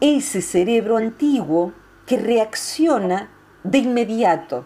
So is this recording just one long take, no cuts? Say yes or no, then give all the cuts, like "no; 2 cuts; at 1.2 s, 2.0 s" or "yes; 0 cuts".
yes; 0 cuts